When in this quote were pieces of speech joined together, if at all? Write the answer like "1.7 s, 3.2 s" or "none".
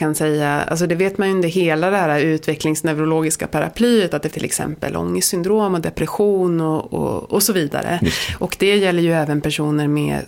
4.3 s